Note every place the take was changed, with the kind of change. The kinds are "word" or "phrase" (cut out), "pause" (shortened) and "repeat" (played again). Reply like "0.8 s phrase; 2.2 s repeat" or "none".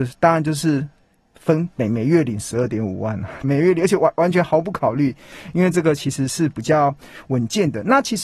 3.4 s word